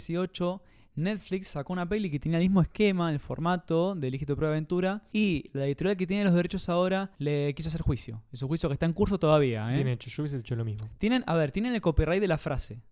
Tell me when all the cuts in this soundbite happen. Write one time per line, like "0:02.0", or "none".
0:07.1

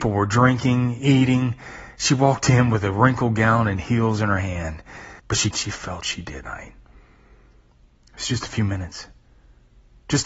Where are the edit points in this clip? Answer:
0:05.2
0:05.5
0:06.0
0:06.4

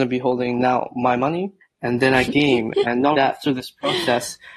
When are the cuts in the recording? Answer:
0:01.6
0:02.2
0:03.1

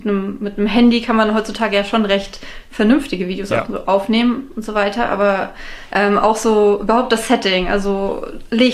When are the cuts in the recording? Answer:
none

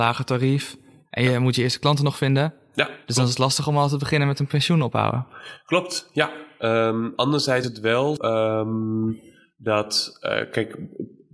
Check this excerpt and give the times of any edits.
0:07.6
0:08.2

